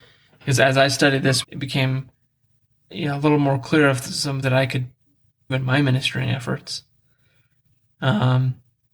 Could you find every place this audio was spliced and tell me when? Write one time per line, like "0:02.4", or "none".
0:01.4
0:02.9
0:04.4
0:05.5